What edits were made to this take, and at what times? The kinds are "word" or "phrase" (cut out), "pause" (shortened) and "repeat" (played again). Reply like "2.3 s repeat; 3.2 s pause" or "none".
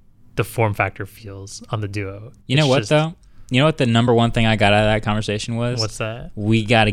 none